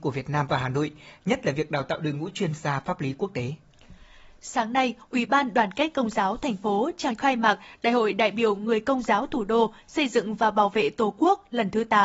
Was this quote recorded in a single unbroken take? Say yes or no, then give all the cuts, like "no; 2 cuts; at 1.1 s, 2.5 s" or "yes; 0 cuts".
no; 1 cut; at 7.2 s